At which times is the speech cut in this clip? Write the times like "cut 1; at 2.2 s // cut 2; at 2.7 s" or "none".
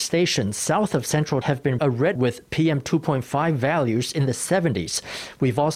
cut 1; at 1.4 s // cut 2; at 1.8 s // cut 3; at 2.2 s